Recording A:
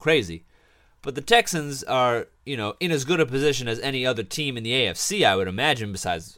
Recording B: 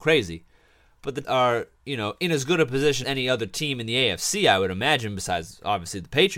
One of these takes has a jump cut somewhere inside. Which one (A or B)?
B